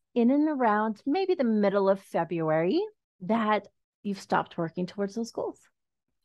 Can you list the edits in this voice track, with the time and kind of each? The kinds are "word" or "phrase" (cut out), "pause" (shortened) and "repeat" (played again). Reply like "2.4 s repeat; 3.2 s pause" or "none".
3.0 s pause